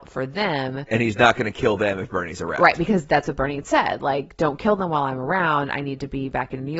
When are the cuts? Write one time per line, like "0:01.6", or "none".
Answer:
none